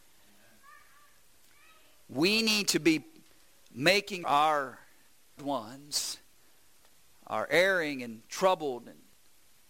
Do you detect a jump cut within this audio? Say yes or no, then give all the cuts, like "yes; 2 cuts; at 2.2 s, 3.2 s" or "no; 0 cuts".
yes; 2 cuts; at 4.2 s, 5.4 s